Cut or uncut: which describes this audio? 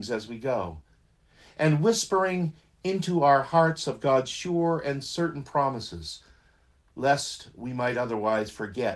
uncut